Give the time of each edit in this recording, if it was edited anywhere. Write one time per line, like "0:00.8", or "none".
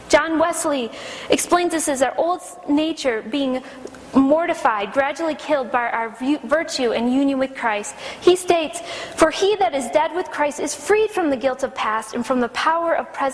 none